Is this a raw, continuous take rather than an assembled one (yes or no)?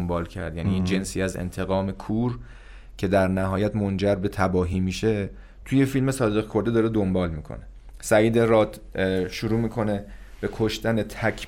yes